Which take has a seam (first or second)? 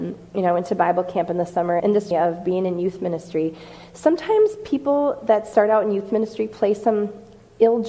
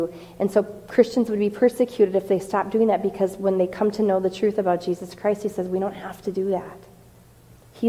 first